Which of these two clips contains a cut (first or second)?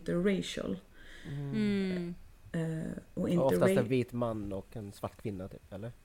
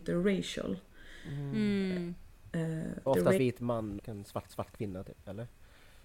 second